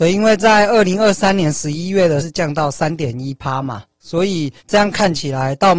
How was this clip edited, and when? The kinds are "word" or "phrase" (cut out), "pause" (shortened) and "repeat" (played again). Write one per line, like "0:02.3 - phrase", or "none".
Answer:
0:02.2 - word
0:04.6 - pause